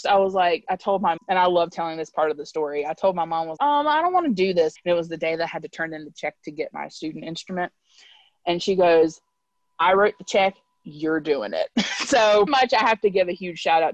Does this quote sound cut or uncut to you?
cut